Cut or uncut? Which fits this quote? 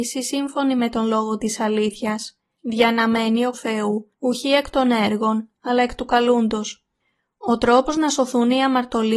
cut